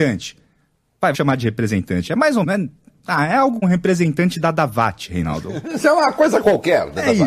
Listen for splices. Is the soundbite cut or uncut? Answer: cut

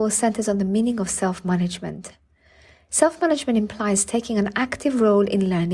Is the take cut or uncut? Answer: uncut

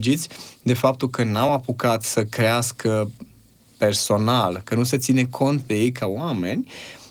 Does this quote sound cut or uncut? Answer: uncut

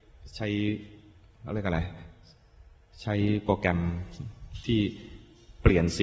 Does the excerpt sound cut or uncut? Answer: uncut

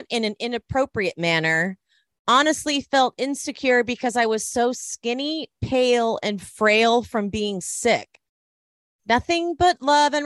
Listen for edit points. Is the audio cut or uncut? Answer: uncut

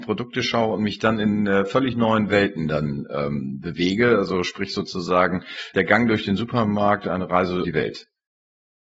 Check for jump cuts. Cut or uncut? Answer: cut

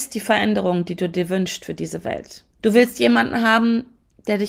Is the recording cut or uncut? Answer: cut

